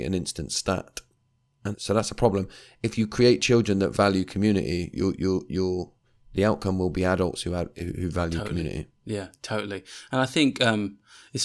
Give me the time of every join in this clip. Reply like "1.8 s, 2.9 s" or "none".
1.7 s, 4.9 s